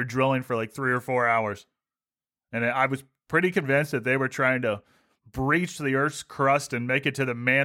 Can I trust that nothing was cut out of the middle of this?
yes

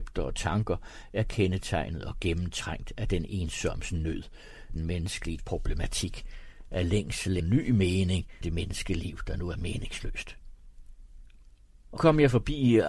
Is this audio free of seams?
no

